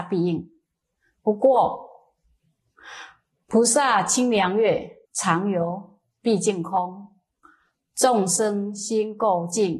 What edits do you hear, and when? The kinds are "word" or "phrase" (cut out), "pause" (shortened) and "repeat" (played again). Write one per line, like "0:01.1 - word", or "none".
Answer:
0:05.0 - pause